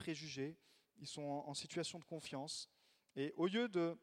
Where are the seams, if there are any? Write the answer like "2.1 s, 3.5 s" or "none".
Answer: none